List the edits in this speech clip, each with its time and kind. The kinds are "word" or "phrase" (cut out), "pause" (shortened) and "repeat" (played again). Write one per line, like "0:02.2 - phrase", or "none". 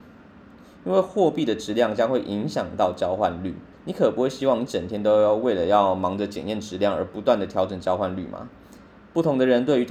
0:03.7 - pause